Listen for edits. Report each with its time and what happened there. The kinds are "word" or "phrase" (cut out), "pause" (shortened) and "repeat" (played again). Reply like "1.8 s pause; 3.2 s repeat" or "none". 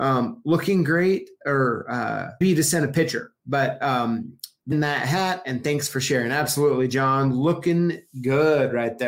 2.4 s word; 4.7 s phrase